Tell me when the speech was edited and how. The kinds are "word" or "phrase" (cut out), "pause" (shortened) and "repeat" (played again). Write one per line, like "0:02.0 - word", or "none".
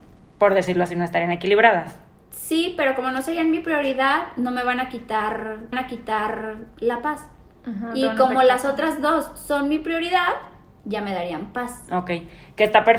0:05.7 - repeat